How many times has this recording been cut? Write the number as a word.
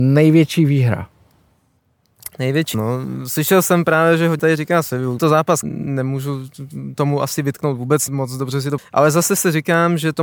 six